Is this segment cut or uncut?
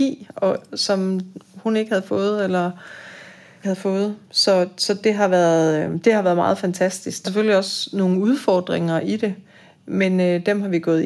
cut